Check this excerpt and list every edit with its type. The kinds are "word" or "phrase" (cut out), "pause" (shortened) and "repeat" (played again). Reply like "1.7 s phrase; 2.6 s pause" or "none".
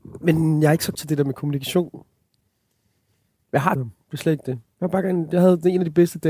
0.9 s word; 3.8 s word